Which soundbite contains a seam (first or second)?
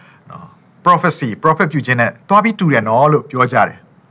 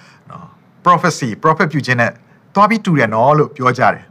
first